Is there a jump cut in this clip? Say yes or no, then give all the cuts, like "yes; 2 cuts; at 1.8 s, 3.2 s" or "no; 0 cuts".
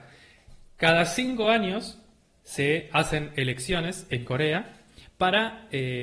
no; 0 cuts